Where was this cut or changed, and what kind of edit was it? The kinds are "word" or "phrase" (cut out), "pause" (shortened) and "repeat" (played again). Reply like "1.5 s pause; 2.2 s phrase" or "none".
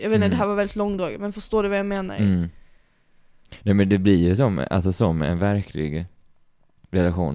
none

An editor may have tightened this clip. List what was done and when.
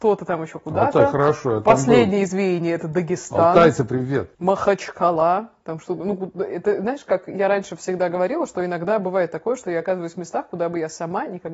4.3 s pause

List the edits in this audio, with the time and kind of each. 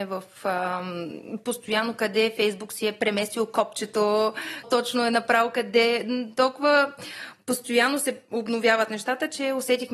4.6 s word

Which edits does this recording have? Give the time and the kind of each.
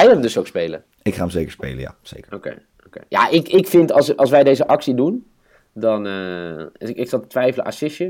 0.9 s pause

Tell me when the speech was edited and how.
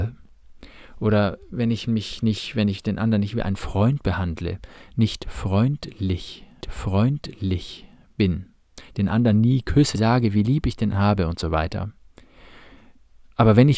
6.6 s repeat; 9.9 s word; 10.9 s word

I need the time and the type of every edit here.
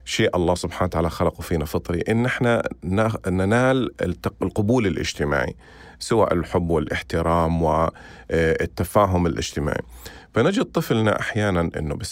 none

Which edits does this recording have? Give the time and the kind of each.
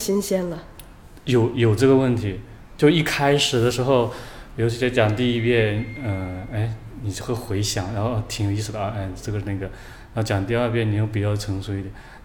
none

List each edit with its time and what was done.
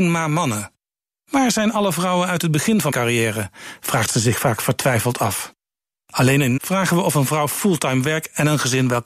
2.9 s word; 6.6 s word

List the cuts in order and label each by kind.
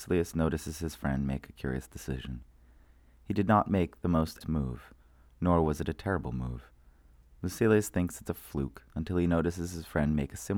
4.4 s word; 8.9 s pause

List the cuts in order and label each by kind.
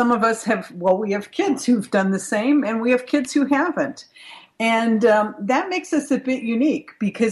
none

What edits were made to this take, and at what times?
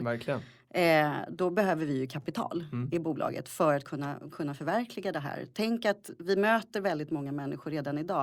none

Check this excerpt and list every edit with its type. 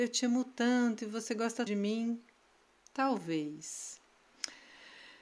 1.7 s phrase

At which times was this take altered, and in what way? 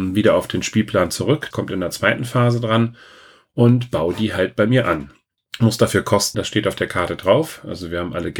1.5 s word; 5.4 s pause; 6.3 s word

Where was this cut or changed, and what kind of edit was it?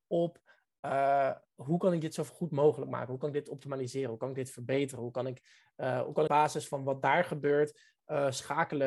6.3 s phrase

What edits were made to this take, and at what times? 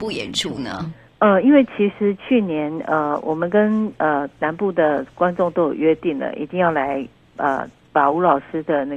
none

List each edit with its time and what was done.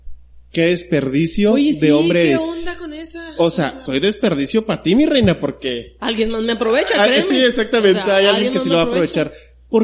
3.9 s word

